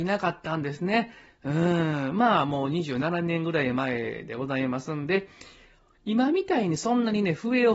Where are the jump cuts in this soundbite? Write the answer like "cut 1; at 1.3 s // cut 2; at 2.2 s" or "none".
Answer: none